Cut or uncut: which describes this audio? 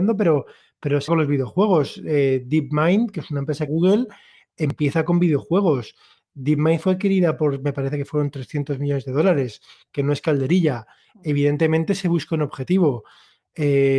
cut